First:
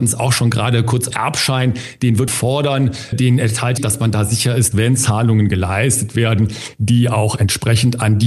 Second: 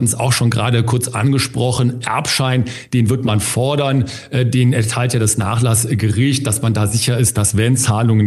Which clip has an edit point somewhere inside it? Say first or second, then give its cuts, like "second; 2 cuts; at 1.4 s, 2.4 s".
first; 5 cuts; at 1.1 s, 2.3 s, 3.1 s, 3.8 s, 4.7 s